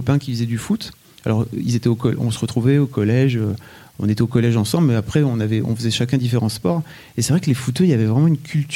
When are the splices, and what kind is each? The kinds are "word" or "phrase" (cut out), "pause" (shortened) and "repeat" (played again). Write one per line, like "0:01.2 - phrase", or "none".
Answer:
none